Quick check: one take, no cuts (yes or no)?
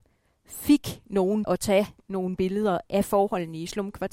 no